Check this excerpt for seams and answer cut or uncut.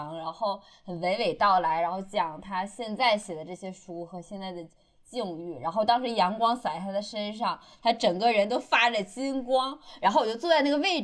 uncut